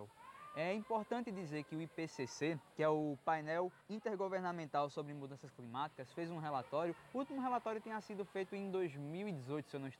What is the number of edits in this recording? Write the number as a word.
two